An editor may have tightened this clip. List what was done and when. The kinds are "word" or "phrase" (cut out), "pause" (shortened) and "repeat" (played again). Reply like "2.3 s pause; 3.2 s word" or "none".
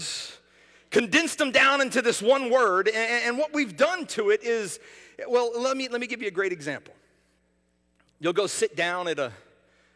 none